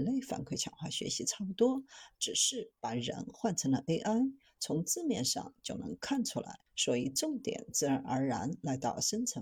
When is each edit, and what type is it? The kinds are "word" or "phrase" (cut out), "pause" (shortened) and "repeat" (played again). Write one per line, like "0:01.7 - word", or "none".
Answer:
0:06.7 - pause